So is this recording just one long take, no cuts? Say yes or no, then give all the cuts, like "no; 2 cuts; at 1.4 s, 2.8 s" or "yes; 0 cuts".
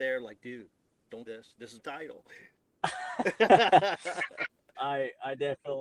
no; 3 cuts; at 1.3 s, 1.8 s, 4.7 s